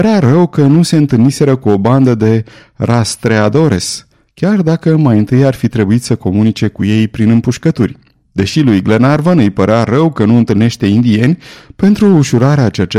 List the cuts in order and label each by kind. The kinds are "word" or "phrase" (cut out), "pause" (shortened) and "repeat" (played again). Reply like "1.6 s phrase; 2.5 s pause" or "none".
none